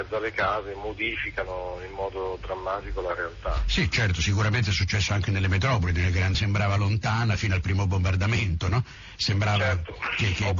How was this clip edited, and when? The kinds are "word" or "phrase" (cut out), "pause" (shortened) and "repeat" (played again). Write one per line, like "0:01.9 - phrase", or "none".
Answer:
0:06.3 - phrase

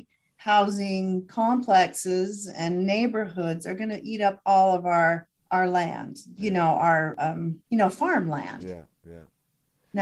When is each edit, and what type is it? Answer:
0:05.3 - pause
0:07.6 - pause

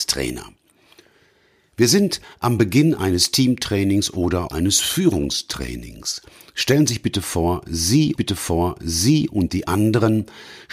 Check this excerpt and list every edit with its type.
0:04.5 - word
0:08.2 - repeat

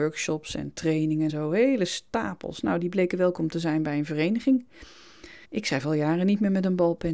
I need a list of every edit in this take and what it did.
0:01.3 - word
0:05.4 - pause

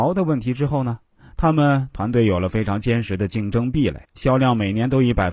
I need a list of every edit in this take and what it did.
0:04.0 - pause

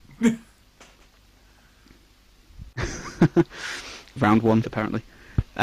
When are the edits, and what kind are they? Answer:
0:04.2 - word
0:04.6 - word

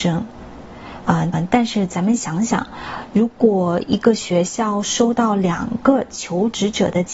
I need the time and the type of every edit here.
0:01.3 - repeat

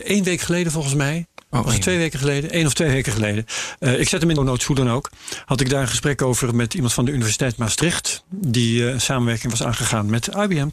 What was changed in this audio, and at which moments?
0:04.4 - word

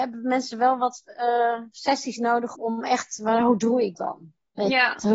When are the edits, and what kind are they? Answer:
0:02.5 - word
0:03.9 - word

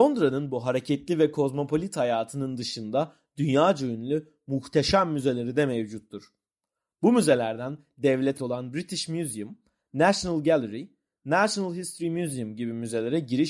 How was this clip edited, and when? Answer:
0:08.4 - word

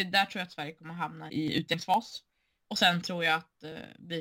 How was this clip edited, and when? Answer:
0:01.3 - word

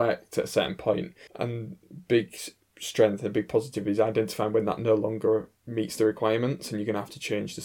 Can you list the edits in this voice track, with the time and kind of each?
0:01.3 - pause
0:02.6 - pause
0:05.6 - pause

